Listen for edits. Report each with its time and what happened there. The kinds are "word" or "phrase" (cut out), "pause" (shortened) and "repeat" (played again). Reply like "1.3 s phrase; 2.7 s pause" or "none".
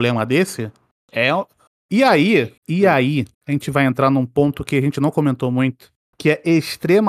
2.6 s pause; 3.3 s pause